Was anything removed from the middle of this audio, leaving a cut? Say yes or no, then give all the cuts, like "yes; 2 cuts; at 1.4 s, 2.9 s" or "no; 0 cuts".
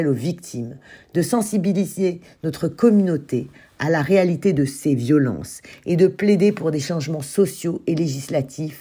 no; 0 cuts